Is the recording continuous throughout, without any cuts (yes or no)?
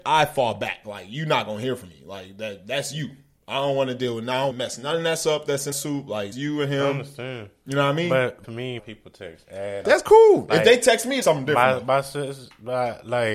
no